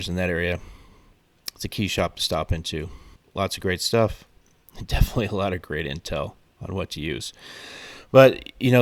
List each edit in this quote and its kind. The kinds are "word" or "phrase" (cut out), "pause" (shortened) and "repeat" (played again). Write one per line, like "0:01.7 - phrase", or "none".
0:03.2 - pause